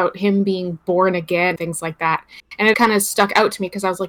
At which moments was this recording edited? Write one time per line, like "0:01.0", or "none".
0:01.6
0:02.7